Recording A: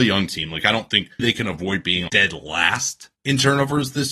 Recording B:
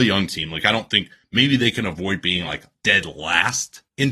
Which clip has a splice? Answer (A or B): A